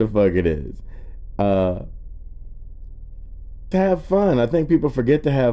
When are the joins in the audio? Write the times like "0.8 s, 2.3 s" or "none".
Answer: 3.7 s